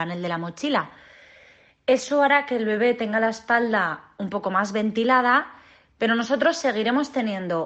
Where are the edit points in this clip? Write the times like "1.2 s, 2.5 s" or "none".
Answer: none